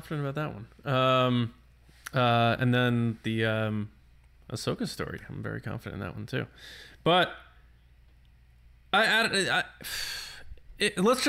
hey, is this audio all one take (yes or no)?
yes